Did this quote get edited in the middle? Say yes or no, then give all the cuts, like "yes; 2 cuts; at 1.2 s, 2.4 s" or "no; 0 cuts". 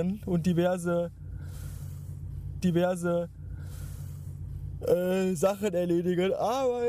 yes; 1 cut; at 2.6 s